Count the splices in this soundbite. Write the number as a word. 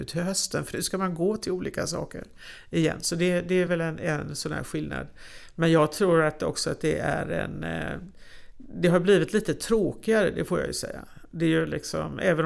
zero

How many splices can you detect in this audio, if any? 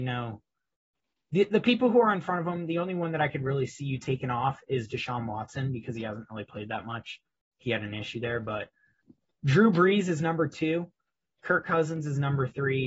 zero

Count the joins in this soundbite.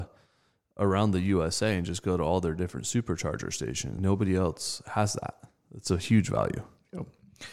two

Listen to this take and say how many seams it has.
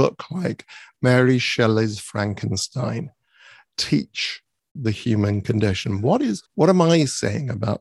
two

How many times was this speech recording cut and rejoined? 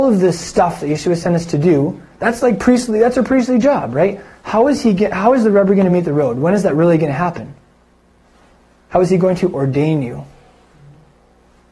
zero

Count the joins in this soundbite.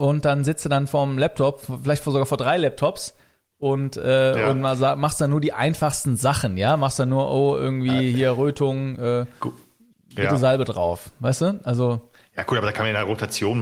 zero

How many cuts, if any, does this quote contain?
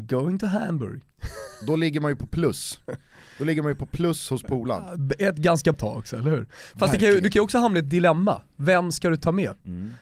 one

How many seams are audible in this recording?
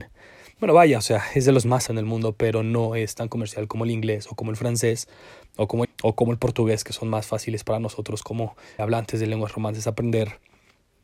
three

